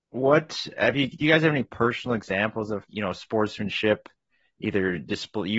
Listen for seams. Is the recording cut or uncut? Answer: cut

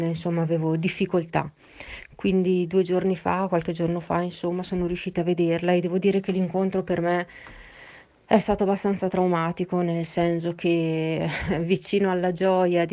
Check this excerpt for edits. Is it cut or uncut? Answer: uncut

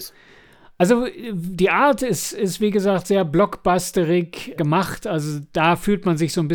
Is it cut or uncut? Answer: cut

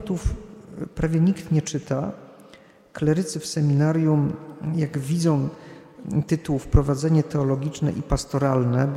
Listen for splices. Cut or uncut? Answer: uncut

